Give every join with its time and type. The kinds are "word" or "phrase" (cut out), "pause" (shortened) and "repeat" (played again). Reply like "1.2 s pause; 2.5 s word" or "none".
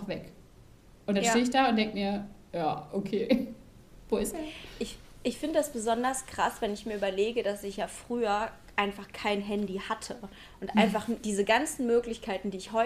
none